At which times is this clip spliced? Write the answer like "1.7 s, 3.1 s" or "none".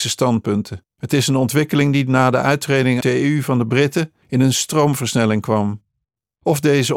0.9 s, 3.0 s, 4.2 s